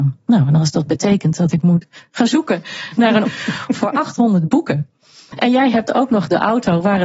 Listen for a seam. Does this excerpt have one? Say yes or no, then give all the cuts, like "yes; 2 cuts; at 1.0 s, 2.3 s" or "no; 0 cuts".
yes; 1 cut; at 3.2 s